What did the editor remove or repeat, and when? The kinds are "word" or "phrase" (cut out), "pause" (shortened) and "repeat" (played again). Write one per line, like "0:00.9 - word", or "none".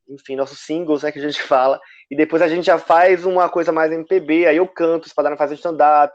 none